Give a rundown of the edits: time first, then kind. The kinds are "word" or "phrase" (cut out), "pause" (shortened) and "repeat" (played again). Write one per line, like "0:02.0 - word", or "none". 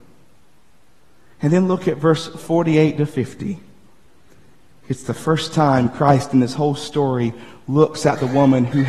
none